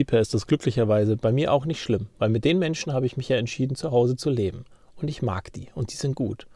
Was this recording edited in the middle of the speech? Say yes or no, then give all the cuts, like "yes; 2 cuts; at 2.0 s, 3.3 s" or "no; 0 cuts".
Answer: no; 0 cuts